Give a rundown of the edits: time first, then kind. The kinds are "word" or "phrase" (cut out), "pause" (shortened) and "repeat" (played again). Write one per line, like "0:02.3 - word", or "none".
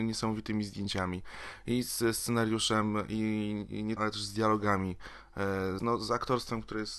0:04.0 - phrase
0:05.8 - word